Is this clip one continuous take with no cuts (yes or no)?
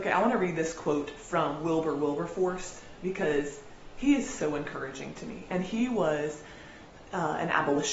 yes